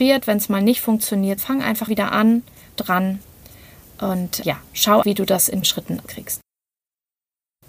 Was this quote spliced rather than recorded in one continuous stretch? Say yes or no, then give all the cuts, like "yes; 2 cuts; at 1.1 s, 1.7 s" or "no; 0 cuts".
yes; 7 cuts; at 1.4 s, 1.9 s, 2.8 s, 4.4 s, 5.0 s, 5.6 s, 6.1 s